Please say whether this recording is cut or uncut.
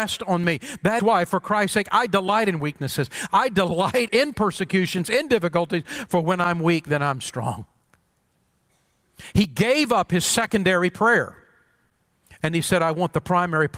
cut